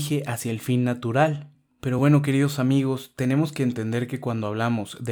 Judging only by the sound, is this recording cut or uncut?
uncut